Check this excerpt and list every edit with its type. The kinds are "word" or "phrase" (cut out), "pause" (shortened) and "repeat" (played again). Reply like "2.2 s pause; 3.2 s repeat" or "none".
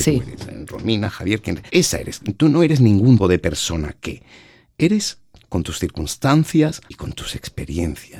1.7 s pause; 3.2 s word; 5.4 s word; 6.9 s pause